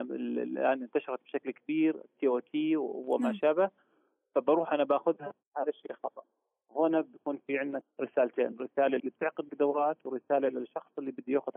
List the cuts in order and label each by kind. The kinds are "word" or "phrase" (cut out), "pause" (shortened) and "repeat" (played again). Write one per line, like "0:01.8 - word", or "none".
0:07.8 - word
0:09.0 - word
0:09.5 - word